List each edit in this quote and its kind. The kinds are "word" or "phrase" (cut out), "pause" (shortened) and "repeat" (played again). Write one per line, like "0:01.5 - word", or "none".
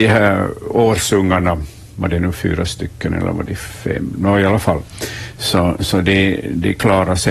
none